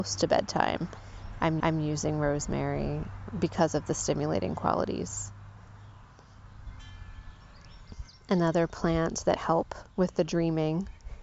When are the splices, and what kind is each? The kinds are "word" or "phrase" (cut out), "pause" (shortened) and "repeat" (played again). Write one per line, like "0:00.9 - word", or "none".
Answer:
0:01.6 - repeat
0:09.4 - word
0:09.9 - pause